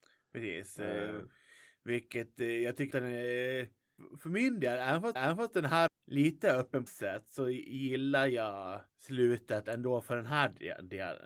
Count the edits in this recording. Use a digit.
5